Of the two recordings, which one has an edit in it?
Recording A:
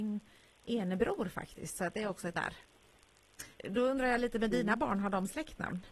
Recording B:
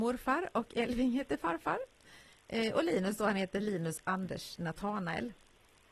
A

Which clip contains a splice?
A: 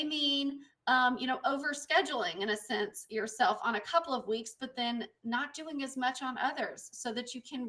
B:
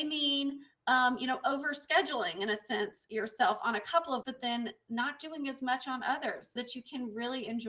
B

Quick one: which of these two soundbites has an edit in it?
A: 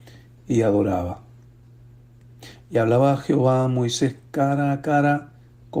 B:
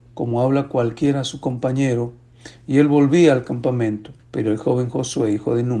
B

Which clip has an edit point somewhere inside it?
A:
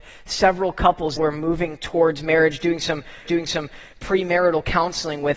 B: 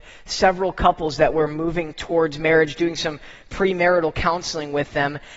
A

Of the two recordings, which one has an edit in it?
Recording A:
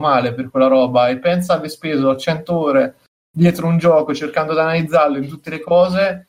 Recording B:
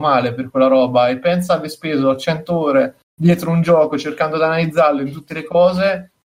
B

